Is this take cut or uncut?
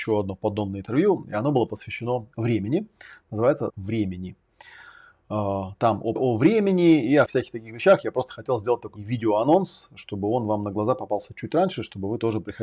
cut